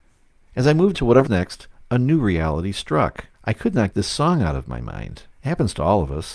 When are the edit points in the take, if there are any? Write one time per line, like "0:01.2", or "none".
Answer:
0:00.9
0:01.3
0:03.3
0:03.9
0:05.3